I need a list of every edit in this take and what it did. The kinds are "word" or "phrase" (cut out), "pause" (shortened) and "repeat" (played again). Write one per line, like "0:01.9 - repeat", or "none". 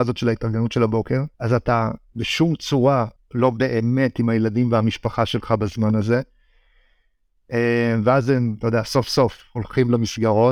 0:01.3 - pause
0:03.2 - pause